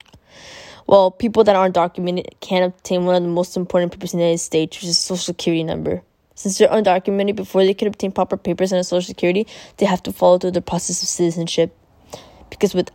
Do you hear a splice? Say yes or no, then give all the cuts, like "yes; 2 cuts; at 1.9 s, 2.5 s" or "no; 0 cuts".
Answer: no; 0 cuts